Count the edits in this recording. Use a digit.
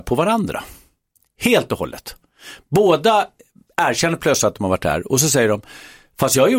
0